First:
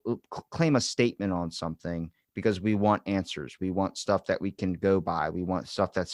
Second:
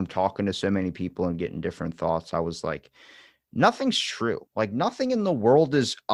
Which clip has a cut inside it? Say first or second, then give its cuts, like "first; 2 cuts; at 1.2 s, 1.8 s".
second; 1 cut; at 4.5 s